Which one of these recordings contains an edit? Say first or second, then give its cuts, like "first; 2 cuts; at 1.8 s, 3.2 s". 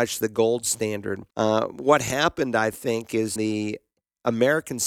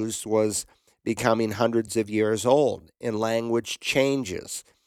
first; 2 cuts; at 1.3 s, 3.4 s